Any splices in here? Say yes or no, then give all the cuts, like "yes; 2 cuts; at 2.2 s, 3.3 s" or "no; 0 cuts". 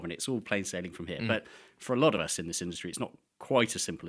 no; 0 cuts